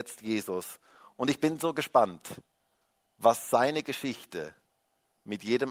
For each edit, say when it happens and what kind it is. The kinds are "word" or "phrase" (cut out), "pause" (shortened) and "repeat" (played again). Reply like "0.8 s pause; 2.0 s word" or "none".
none